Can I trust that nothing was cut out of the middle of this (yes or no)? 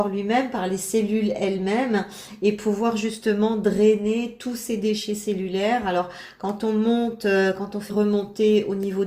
no